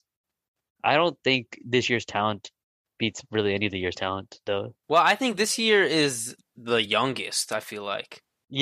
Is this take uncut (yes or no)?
yes